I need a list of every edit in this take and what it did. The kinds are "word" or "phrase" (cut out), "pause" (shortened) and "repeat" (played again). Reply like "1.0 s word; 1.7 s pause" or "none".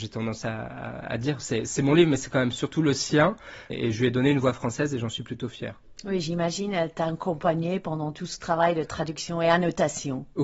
3.7 s word

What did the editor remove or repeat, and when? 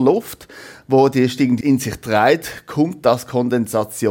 1.6 s word

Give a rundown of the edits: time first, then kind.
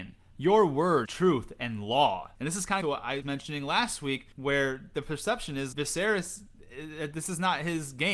1.1 s word; 2.3 s pause; 2.8 s phrase; 3.2 s word; 4.3 s pause; 5.7 s word

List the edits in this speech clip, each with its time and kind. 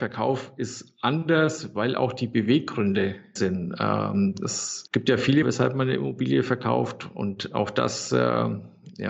3.4 s word; 4.9 s word; 5.4 s word

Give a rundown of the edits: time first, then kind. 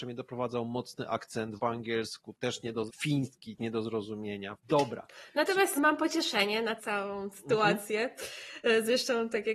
1.6 s word; 2.9 s word; 3.6 s word; 4.6 s word; 5.8 s word; 6.8 s word

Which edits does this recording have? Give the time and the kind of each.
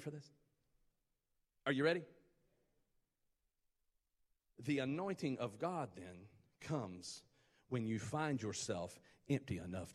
none

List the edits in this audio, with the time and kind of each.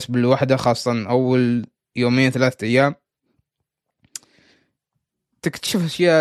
none

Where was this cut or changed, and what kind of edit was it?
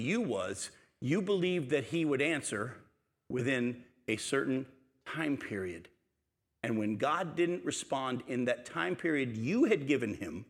none

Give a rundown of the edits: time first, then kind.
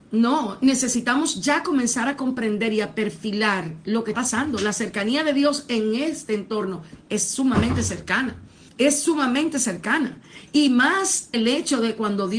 4.1 s word; 8.7 s pause; 11.3 s word

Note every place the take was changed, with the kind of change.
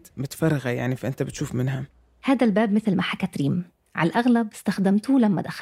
none

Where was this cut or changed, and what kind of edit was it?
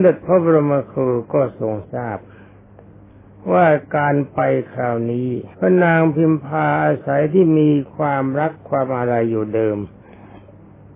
5.5 s pause

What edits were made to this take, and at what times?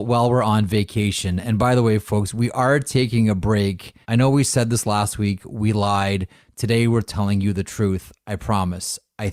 4.0 s pause

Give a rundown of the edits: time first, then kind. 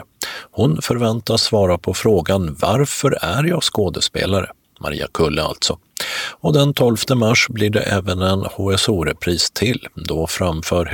none

